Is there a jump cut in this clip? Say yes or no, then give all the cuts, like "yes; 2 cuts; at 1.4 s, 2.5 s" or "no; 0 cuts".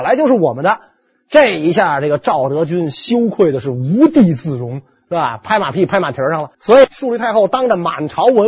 yes; 1 cut; at 6.5 s